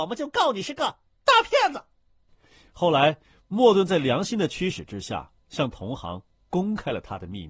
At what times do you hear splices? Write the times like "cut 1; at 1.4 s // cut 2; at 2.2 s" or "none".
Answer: none